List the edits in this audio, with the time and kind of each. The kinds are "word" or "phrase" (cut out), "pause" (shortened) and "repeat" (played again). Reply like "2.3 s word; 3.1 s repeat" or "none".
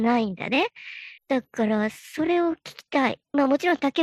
1.2 s pause